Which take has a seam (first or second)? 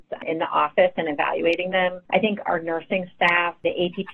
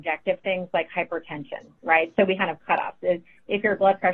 second